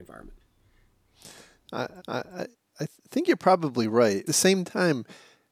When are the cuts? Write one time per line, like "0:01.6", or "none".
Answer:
0:02.0
0:03.0
0:04.3